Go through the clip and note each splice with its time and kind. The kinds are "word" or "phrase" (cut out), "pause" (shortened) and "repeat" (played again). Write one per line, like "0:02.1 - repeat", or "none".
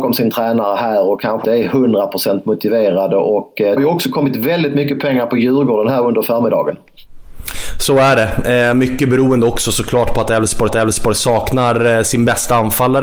0:01.4 - word
0:03.8 - word
0:10.7 - repeat